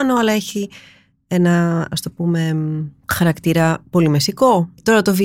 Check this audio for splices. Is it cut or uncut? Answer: uncut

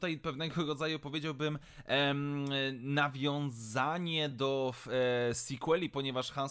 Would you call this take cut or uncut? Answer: uncut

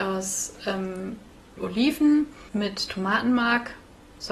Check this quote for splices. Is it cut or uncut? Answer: cut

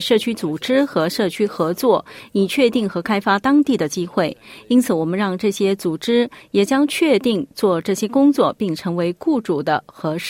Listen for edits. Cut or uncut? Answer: uncut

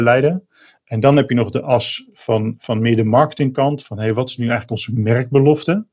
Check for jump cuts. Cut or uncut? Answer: uncut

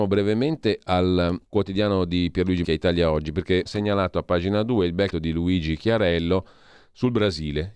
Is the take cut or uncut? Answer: cut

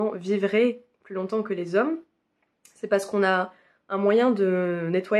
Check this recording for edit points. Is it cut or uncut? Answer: uncut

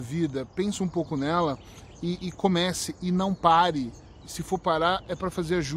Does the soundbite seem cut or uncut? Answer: uncut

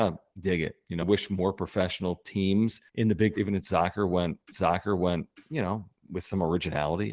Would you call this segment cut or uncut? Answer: cut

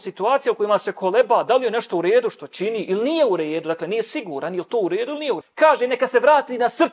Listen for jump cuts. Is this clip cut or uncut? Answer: cut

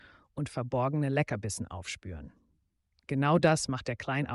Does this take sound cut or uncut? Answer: uncut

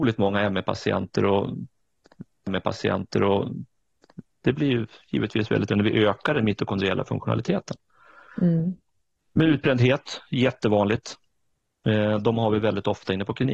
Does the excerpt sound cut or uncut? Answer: cut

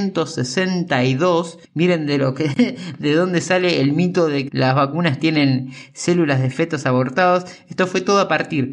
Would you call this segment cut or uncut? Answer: cut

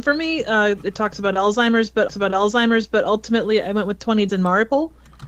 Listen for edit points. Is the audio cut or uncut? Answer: cut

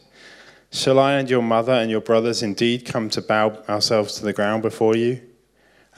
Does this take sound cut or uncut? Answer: uncut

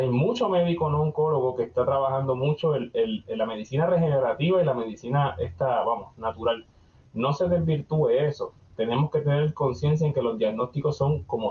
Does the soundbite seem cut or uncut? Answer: uncut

